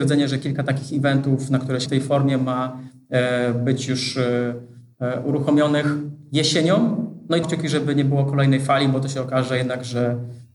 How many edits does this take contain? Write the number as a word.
two